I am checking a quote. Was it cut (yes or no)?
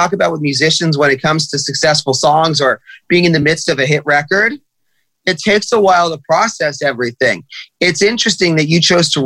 no